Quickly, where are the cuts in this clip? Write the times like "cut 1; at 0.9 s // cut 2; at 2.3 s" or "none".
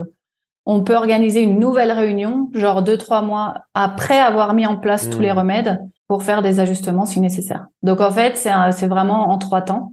cut 1; at 6.0 s